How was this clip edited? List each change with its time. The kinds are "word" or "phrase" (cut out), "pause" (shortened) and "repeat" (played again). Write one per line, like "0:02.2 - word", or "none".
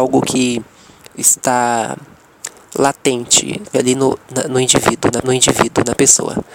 0:03.7 - word
0:05.2 - repeat